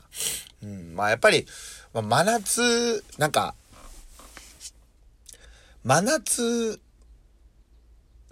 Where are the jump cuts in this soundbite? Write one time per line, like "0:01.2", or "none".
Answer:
0:03.1